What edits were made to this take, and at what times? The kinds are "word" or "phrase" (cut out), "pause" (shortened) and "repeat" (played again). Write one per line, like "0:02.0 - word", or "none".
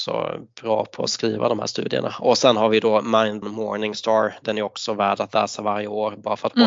0:03.4 - phrase

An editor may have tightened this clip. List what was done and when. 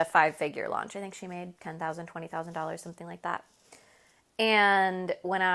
none

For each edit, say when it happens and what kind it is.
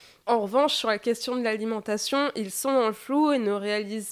none

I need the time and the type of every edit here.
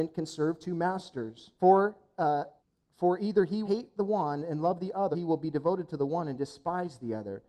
0:01.6 - pause
0:02.6 - pause
0:03.6 - word
0:05.1 - word

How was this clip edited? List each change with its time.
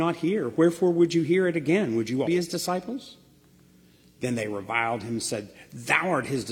0:02.2 - word

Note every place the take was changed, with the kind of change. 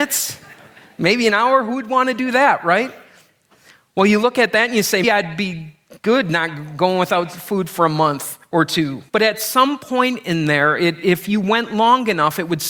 0:05.0 - word
0:09.1 - pause

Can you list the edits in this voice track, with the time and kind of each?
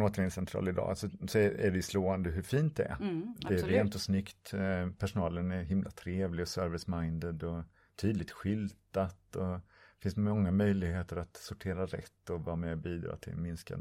none

